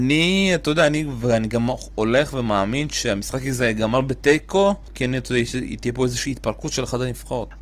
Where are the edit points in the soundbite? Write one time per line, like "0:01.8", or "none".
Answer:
none